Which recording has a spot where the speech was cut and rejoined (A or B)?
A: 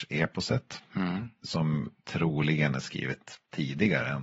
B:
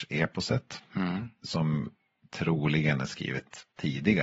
A